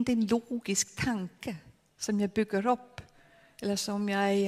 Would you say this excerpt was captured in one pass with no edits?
yes; 0 cuts

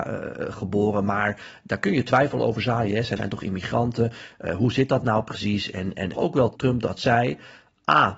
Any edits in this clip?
yes; 3 cuts; at 3.2 s, 6.1 s, 6.6 s

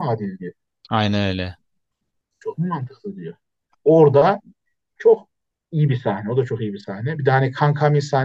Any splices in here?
no; 0 cuts

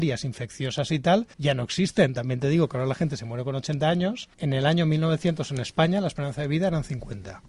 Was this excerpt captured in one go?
no; 2 cuts; at 1.3 s, 4.3 s

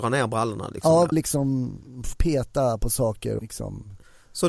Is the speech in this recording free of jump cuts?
no; 3 cuts; at 1.1 s, 2.1 s, 3.4 s

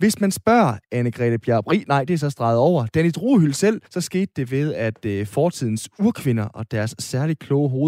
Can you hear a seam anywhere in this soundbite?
yes; 1 cut; at 3.9 s

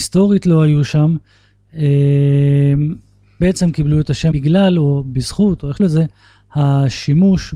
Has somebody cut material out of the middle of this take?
yes; 3 cuts; at 3.4 s, 4.3 s, 5.8 s

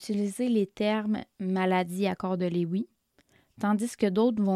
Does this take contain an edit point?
no; 0 cuts

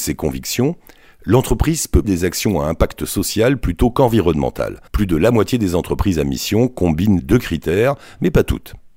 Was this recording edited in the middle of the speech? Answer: yes; 3 cuts; at 2.0 s, 4.9 s, 7.2 s

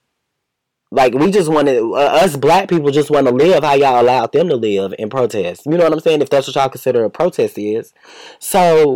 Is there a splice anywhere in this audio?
no; 0 cuts

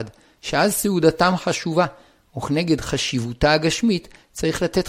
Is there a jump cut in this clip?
no; 0 cuts

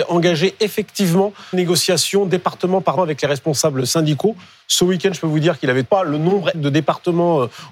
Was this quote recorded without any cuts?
no; 4 cuts; at 1.5 s, 3.0 s, 5.8 s, 6.5 s

